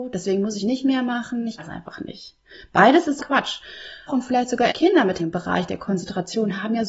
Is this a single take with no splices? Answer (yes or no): no